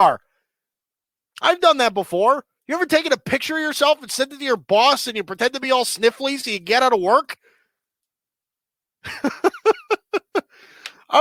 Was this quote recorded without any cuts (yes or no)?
yes